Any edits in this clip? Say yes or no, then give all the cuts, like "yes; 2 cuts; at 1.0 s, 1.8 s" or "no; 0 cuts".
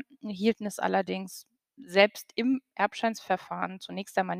no; 0 cuts